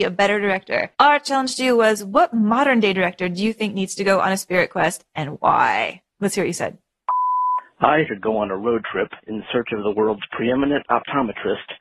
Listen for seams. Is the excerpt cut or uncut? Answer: cut